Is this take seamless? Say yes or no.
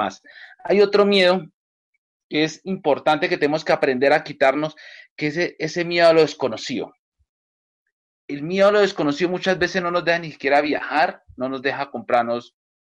yes